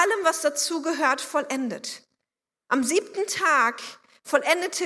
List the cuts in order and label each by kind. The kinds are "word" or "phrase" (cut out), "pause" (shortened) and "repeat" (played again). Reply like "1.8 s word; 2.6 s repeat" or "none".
none